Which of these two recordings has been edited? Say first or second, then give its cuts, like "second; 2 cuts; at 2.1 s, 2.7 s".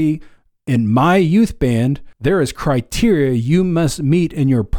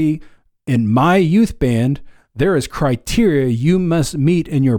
first; 1 cut; at 2.1 s